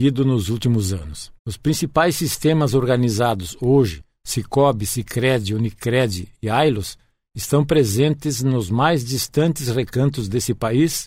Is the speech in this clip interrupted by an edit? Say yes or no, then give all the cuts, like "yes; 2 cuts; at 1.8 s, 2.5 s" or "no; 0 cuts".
yes; 1 cut; at 1.4 s